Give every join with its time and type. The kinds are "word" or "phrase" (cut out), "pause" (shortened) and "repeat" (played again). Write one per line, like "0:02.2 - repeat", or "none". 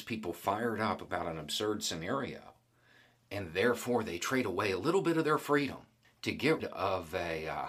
0:06.0 - pause
0:06.6 - word

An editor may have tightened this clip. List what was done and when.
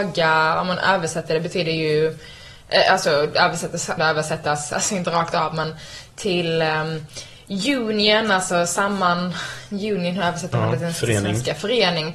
0:04.0 - phrase

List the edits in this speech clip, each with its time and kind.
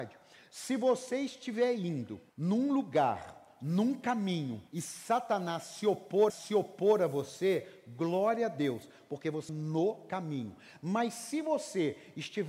0:02.3 - pause
0:04.7 - pause
0:06.3 - repeat
0:09.5 - phrase

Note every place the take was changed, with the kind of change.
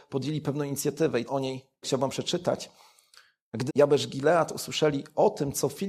0:01.3 - word
0:01.8 - word
0:03.7 - word

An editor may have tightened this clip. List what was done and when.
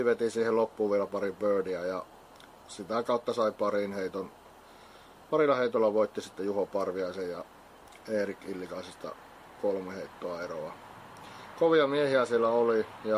none

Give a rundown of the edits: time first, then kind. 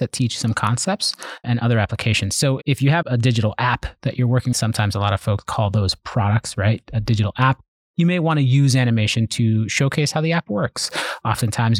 0:01.4 - word
0:02.6 - word
0:03.0 - word
0:04.5 - word

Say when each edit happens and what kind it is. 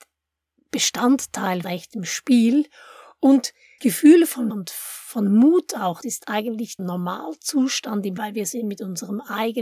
0:01.6 - word
0:03.8 - word
0:04.5 - word
0:06.0 - word
0:06.8 - word
0:08.2 - word

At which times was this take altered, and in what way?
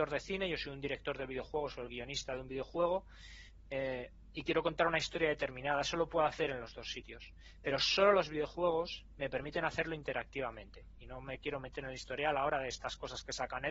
none

